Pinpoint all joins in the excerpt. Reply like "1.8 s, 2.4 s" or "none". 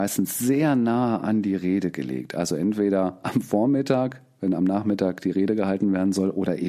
none